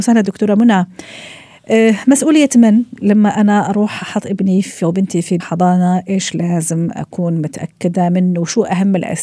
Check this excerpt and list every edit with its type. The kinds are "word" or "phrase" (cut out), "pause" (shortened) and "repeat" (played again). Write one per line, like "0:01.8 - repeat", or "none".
0:05.4 - word

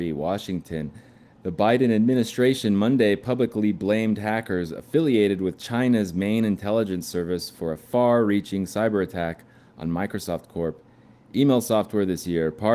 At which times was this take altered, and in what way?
none

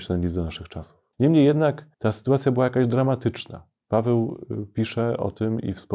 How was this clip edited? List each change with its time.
0:01.1 - pause
0:01.9 - pause

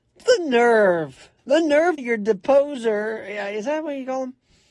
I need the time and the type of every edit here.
0:01.4 - pause
0:02.0 - phrase

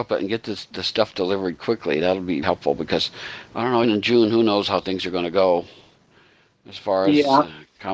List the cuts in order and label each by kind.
0:02.4 - word
0:03.8 - word

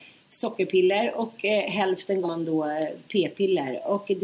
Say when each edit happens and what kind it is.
0:02.2 - word

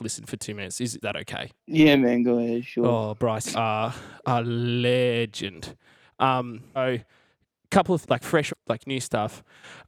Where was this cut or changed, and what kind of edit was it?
0:01.0 - word
0:01.6 - pause
0:03.5 - word
0:06.8 - word
0:08.0 - word
0:08.5 - word

